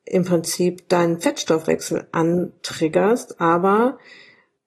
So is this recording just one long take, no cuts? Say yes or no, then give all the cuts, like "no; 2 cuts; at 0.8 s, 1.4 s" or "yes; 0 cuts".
yes; 0 cuts